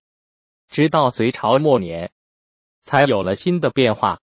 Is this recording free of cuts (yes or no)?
yes